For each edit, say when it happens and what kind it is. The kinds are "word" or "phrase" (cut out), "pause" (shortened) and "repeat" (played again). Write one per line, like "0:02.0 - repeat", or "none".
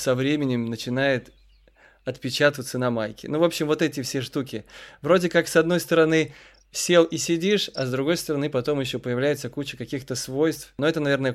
none